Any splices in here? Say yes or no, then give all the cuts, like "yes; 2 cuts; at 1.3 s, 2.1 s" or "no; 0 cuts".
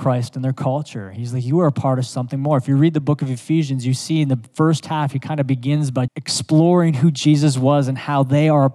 yes; 1 cut; at 6.1 s